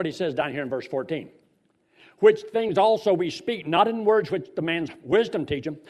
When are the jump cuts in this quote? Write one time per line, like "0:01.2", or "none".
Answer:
none